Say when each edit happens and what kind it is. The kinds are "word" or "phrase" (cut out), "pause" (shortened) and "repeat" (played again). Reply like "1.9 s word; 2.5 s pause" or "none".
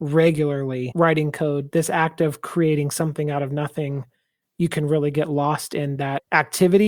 none